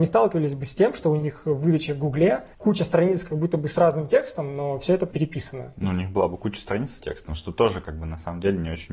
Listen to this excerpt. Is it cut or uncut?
cut